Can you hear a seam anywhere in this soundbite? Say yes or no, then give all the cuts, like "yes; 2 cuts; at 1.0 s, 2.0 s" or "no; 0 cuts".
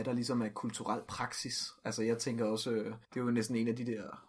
yes; 1 cut; at 3.0 s